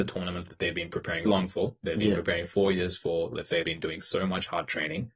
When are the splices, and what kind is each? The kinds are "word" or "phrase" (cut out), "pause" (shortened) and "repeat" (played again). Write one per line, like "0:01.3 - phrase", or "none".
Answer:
0:01.2 - word
0:03.6 - word